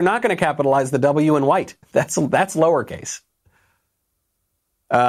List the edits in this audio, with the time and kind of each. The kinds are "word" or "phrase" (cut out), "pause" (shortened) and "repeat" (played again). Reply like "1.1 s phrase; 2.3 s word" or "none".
1.8 s pause